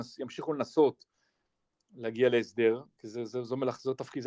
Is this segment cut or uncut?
uncut